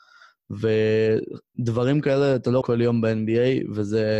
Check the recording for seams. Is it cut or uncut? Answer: cut